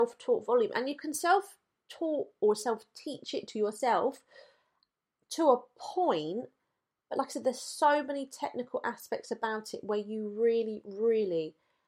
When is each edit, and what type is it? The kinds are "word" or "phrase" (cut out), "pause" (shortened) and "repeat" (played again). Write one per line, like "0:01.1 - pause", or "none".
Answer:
none